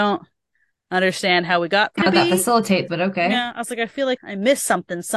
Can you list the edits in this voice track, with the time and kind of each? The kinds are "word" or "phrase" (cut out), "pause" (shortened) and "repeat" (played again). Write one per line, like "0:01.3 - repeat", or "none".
0:02.0 - word
0:02.9 - word
0:04.2 - word